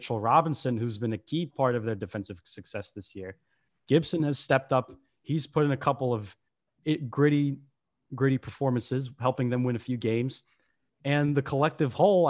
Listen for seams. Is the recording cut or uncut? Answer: uncut